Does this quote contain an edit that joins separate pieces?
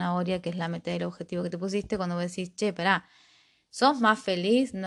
no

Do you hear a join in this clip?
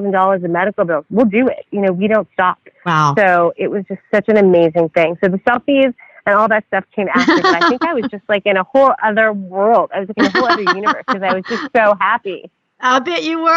no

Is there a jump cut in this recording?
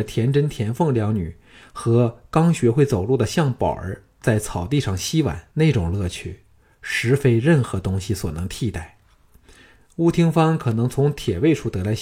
yes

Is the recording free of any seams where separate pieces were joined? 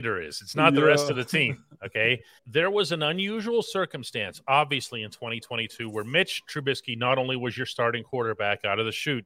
no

